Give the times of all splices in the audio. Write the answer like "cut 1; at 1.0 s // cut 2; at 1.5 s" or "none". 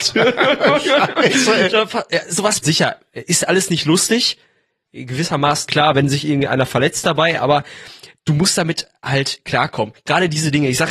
cut 1; at 2.6 s // cut 2; at 5.7 s